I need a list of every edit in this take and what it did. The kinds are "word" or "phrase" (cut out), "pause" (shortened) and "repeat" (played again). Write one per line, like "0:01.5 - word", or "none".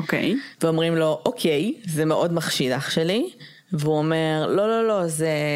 0:03.6 - pause